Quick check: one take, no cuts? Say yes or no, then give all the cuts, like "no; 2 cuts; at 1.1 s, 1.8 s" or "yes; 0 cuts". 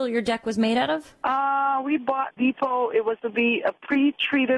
no; 2 cuts; at 2.4 s, 3.2 s